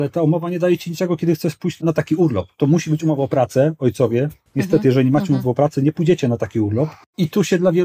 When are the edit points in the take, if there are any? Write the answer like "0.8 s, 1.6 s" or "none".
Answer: none

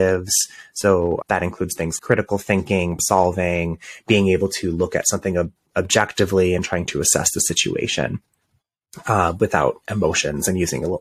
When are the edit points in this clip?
1.2 s, 2.0 s, 3.0 s

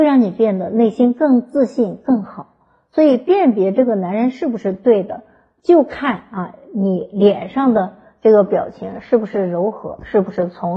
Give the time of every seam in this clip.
none

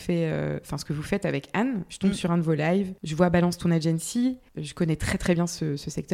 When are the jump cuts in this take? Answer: 3.0 s, 4.5 s

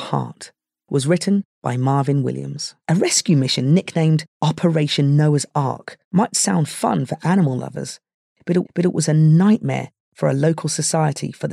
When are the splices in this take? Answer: 2.8 s, 4.3 s, 6.0 s, 8.6 s

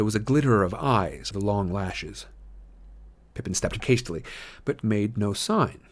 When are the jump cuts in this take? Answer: 1.3 s, 3.8 s, 4.8 s

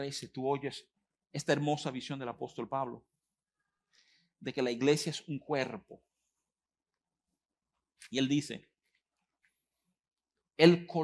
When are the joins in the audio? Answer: none

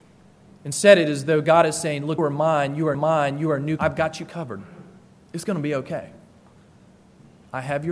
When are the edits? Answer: 2.2 s, 2.9 s, 3.8 s, 5.0 s

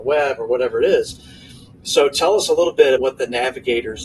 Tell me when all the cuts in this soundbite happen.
3.0 s

